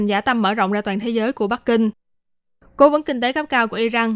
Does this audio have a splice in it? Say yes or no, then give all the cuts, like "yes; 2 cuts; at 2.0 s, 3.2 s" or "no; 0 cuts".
no; 0 cuts